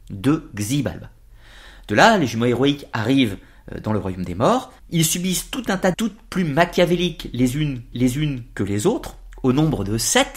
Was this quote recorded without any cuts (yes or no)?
no